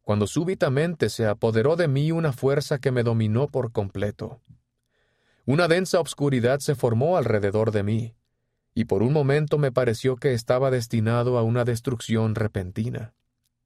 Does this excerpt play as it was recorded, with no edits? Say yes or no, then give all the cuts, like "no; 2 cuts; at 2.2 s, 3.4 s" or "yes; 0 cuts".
yes; 0 cuts